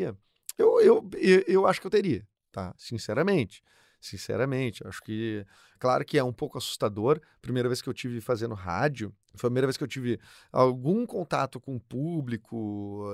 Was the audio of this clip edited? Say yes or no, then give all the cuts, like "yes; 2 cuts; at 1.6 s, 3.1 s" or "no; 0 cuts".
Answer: yes; 1 cut; at 9.2 s